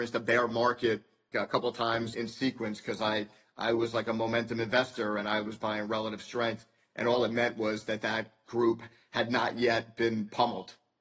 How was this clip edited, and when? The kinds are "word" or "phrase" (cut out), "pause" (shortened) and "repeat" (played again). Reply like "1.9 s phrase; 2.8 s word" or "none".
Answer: 1.3 s word; 2.1 s word

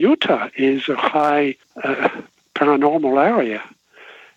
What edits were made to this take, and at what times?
1.6 s pause

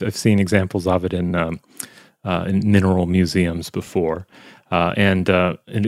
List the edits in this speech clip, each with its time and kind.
none

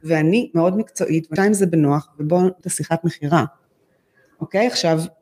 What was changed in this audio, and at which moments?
1.4 s word; 2.6 s word

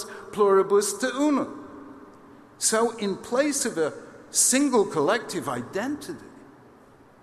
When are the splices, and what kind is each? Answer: none

